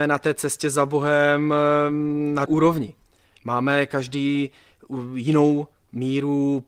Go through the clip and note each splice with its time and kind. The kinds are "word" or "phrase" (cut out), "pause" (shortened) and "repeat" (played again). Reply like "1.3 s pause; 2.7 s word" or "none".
2.5 s word